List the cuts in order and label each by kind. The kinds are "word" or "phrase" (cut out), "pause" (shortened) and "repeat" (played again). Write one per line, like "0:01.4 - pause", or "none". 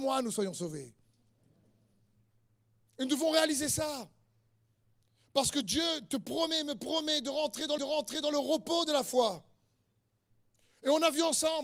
0:07.8 - repeat